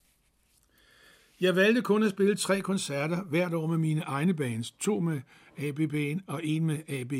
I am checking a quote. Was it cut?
no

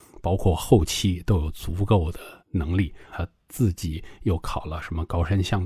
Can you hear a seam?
yes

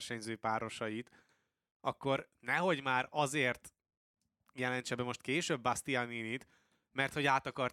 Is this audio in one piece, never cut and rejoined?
yes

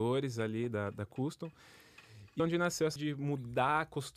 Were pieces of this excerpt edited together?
yes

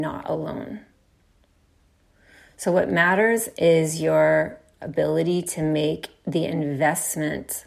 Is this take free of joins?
yes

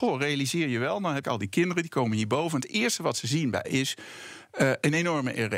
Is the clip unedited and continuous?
no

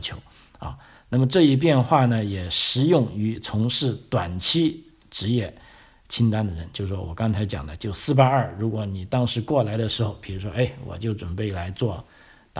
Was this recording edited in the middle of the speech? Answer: no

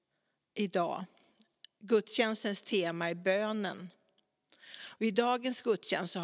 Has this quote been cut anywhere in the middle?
no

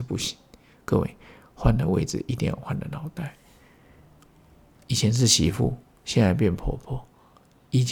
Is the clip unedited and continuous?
yes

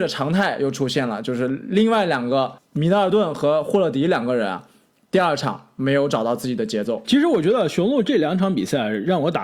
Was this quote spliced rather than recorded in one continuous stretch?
yes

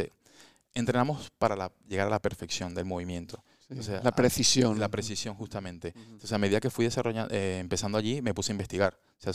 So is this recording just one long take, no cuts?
yes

